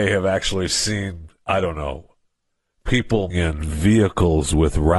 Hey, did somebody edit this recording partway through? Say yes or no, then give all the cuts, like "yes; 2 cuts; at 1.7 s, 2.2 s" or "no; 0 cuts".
yes; 1 cut; at 3.3 s